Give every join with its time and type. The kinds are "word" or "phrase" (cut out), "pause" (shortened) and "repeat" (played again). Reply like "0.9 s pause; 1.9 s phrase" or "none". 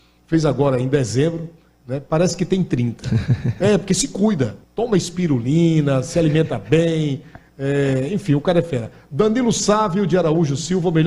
4.6 s pause